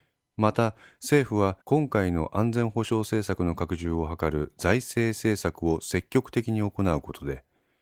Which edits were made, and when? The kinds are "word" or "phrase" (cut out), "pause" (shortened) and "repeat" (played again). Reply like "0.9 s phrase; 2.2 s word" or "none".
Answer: 1.6 s pause